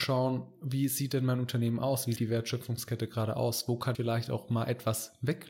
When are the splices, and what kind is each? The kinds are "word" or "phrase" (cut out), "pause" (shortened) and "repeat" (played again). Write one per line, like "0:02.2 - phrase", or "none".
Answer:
0:02.2 - word
0:03.9 - word